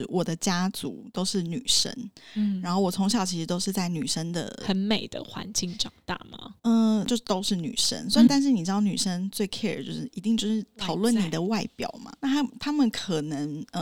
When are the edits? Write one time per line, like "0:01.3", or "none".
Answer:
0:06.6
0:08.3
0:12.2